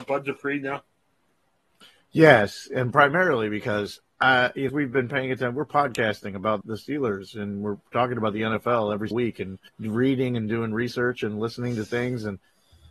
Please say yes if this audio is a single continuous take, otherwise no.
no